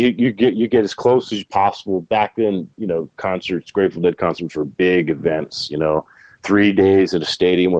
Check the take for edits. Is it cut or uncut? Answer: uncut